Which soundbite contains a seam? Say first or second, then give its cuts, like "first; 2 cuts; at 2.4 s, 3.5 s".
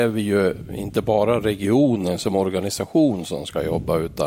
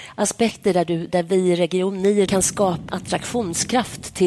second; 3 cuts; at 1.1 s, 2.3 s, 2.9 s